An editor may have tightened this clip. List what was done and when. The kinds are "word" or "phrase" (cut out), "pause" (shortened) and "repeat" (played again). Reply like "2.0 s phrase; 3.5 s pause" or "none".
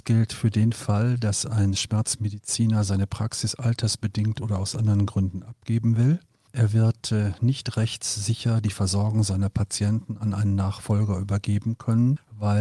none